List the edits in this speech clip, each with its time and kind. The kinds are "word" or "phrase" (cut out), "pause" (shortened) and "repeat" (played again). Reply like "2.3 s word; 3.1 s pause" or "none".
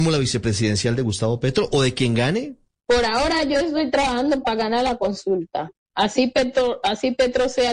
none